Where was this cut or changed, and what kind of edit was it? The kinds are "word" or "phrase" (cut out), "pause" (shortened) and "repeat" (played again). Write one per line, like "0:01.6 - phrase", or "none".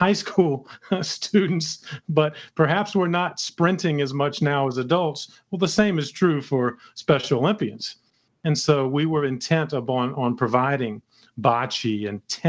none